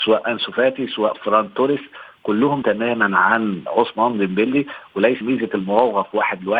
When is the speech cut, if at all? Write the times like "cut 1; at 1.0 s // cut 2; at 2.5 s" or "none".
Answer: cut 1; at 2.6 s // cut 2; at 5.2 s